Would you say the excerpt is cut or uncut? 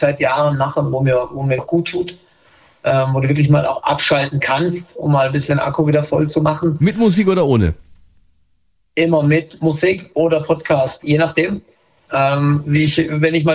cut